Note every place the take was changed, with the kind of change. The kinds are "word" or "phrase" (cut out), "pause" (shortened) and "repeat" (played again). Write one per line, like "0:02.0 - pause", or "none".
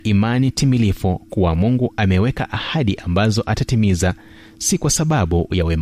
none